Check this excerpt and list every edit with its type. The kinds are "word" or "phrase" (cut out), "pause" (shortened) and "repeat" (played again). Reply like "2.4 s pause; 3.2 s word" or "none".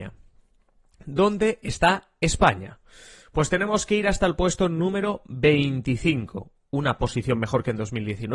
none

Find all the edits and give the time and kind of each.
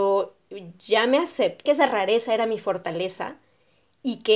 1.7 s word

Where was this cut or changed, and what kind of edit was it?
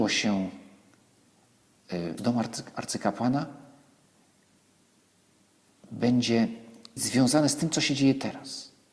2.2 s phrase; 7.0 s word

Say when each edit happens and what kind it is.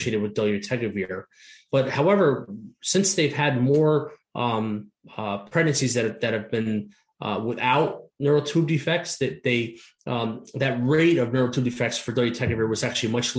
none

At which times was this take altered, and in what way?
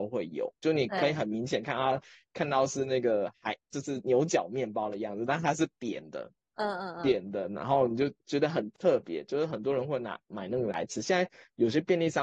none

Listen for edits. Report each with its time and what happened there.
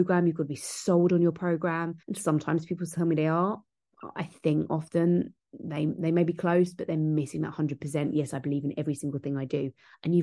2.0 s pause

